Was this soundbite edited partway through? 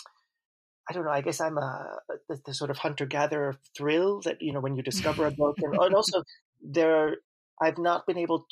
no; 0 cuts

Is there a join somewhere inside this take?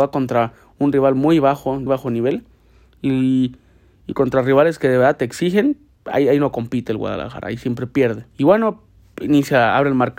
yes; 2 cuts; at 1.9 s, 8.3 s

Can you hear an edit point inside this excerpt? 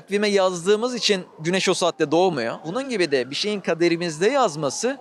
no; 0 cuts

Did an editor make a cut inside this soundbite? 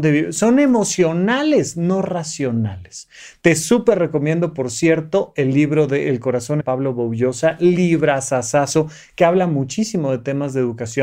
yes; 1 cut; at 6.6 s

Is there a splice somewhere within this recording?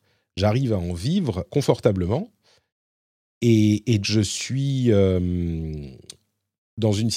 yes; 2 cuts; at 1.5 s, 4.0 s

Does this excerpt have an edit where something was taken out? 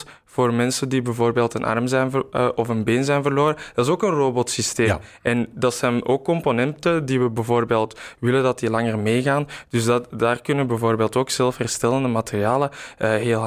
no; 0 cuts

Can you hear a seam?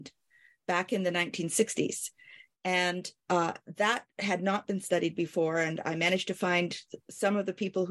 no; 0 cuts

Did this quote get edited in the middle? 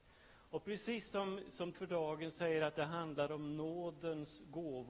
yes; 1 cut; at 1.7 s

